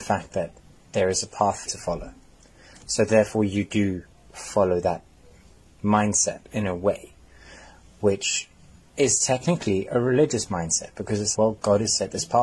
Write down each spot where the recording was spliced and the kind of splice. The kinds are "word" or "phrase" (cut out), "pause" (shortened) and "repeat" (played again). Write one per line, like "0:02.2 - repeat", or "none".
0:01.7 - word
0:11.3 - word